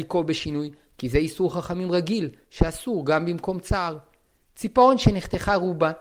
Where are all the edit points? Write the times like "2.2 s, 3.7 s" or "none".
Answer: none